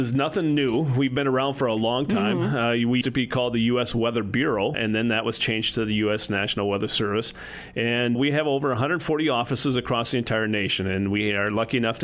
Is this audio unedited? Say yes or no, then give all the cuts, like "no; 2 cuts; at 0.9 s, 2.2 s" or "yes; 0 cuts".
no; 3 cuts; at 3.0 s, 4.7 s, 8.1 s